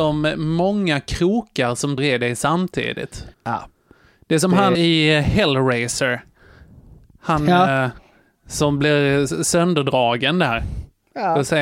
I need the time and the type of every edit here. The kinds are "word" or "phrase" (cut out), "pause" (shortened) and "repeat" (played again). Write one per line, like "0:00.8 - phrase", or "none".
0:02.0 - word
0:03.3 - pause
0:04.7 - word